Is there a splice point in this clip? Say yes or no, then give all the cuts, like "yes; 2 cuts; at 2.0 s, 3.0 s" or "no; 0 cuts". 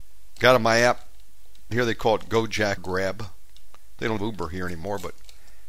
yes; 3 cuts; at 1.7 s, 2.8 s, 4.2 s